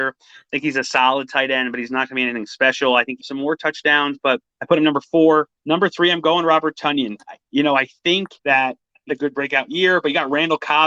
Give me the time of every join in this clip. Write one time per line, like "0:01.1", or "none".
0:03.2
0:04.5
0:05.6
0:07.4
0:08.4
0:09.1